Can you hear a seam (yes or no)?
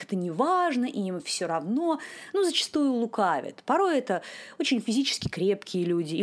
no